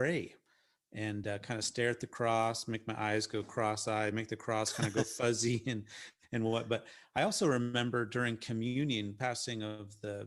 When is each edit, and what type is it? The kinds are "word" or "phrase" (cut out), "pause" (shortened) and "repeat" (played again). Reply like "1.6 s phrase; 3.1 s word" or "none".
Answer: none